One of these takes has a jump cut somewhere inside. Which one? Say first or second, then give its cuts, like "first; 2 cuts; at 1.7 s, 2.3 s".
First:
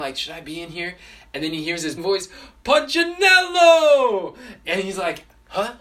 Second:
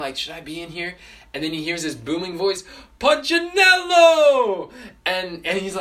first; 2 cuts; at 2.0 s, 4.6 s